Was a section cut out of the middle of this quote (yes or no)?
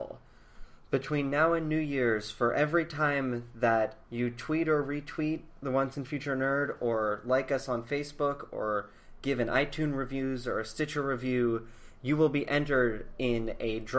yes